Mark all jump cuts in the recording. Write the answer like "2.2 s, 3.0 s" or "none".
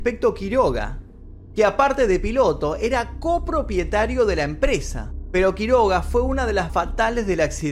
6.7 s